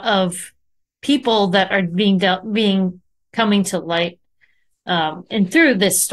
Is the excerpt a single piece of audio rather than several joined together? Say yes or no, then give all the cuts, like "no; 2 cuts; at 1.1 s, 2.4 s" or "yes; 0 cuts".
yes; 0 cuts